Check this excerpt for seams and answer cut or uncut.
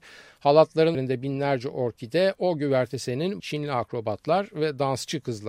cut